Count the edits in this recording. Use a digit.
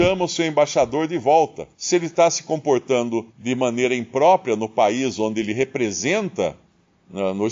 2